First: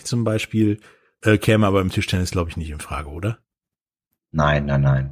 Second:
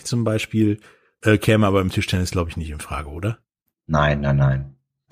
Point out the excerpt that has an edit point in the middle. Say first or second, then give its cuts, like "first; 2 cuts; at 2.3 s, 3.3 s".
second; 1 cut; at 3.5 s